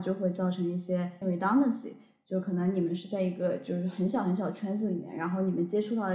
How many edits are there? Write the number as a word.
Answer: one